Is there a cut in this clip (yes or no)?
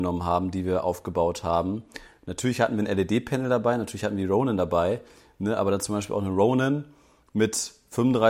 no